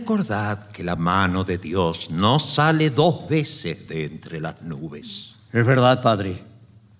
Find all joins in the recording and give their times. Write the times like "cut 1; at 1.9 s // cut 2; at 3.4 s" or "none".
none

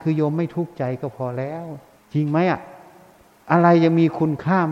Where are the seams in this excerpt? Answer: cut 1; at 2.0 s

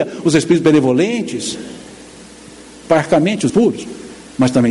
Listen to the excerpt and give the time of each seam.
cut 1; at 3.5 s

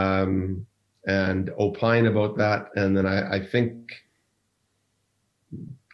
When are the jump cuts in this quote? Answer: none

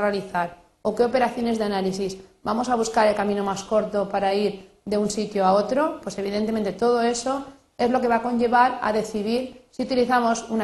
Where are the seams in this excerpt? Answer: none

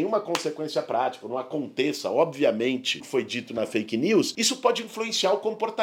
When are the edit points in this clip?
cut 1; at 3.0 s

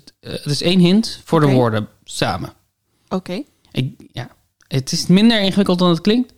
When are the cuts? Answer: none

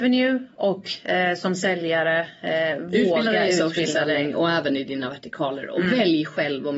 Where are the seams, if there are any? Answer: none

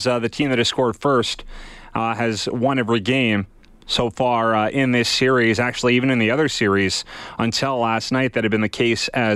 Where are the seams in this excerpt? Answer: none

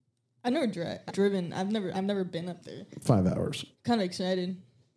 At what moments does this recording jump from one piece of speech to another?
cut 1; at 1.1 s // cut 2; at 1.9 s // cut 3; at 3.7 s

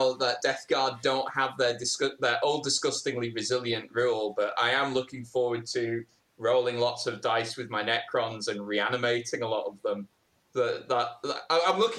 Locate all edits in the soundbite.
none

